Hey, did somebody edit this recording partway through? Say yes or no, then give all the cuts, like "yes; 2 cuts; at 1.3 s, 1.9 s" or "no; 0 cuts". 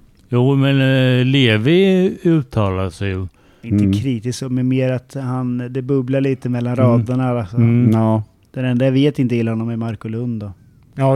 no; 0 cuts